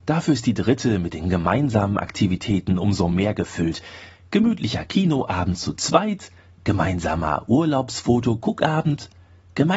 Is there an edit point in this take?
no; 0 cuts

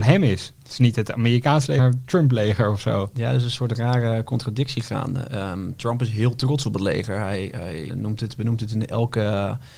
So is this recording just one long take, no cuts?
no; 2 cuts; at 1.8 s, 7.9 s

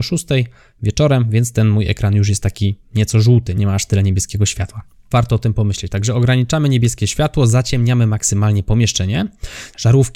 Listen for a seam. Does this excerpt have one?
no; 0 cuts

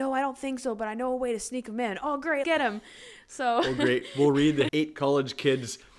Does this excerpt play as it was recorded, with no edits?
no; 2 cuts; at 2.4 s, 4.7 s

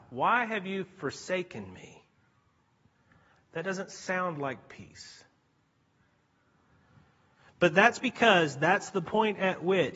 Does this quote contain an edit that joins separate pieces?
no; 0 cuts

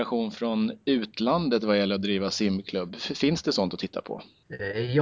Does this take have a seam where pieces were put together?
no; 0 cuts

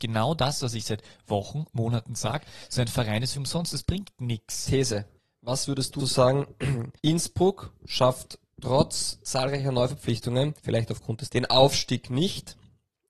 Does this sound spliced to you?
yes; 6 cuts; at 3.3 s, 5.2 s, 6.0 s, 7.0 s, 10.6 s, 11.3 s

